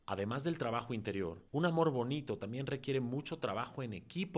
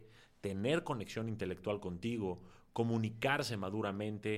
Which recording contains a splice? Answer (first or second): first